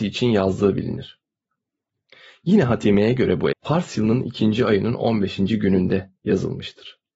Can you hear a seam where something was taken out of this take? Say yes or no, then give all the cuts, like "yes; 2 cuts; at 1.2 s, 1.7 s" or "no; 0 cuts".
yes; 1 cut; at 3.5 s